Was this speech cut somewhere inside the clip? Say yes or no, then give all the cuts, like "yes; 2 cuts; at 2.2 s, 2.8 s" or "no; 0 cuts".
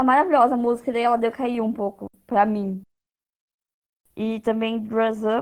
no; 0 cuts